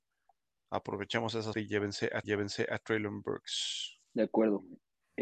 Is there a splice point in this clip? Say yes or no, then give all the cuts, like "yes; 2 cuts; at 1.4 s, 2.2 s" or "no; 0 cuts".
yes; 3 cuts; at 1.5 s, 2.2 s, 4.0 s